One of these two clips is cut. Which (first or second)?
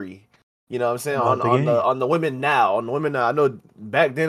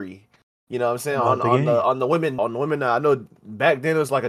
second